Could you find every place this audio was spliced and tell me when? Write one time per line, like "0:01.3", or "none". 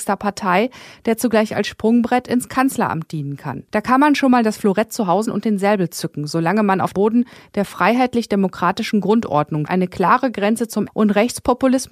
0:03.7
0:05.2
0:06.9
0:09.7
0:10.9